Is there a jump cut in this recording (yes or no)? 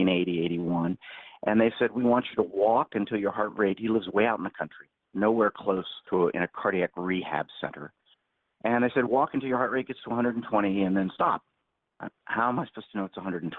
yes